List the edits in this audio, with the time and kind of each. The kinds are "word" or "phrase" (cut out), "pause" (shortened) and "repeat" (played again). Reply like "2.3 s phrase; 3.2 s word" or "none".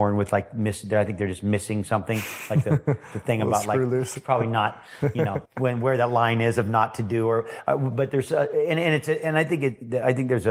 5.5 s pause